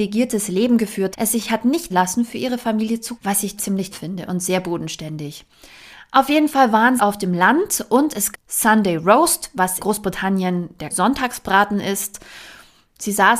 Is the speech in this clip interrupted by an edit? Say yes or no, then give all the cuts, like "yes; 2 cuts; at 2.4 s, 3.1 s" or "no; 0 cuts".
yes; 9 cuts; at 1.1 s, 1.9 s, 3.2 s, 3.6 s, 3.9 s, 7.0 s, 8.3 s, 9.8 s, 10.9 s